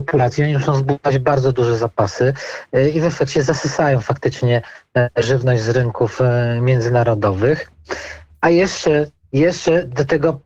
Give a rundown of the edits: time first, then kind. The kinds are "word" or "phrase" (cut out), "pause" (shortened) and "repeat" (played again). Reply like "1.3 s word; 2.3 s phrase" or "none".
none